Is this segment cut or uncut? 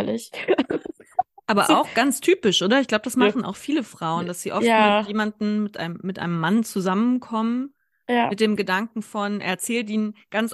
uncut